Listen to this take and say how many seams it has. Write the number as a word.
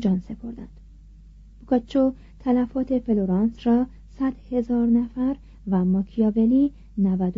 zero